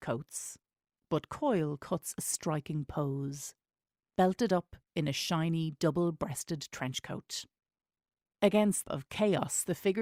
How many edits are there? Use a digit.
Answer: 1